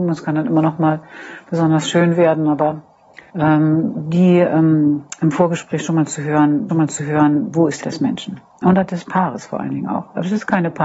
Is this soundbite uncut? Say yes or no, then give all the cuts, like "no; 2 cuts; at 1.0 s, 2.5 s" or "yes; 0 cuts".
no; 3 cuts; at 3.3 s, 6.7 s, 7.8 s